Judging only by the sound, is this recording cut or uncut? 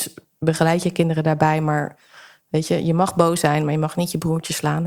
uncut